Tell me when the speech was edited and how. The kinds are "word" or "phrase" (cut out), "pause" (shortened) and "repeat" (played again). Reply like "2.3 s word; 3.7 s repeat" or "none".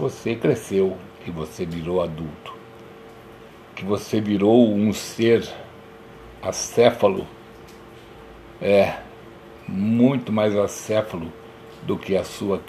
none